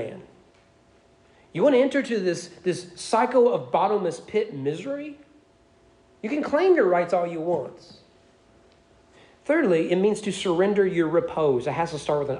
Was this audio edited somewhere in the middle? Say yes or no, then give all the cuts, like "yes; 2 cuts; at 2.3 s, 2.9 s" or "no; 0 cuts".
no; 0 cuts